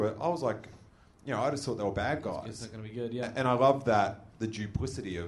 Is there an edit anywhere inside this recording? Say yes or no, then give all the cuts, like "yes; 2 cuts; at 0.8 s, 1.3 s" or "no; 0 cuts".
yes; 1 cut; at 4.3 s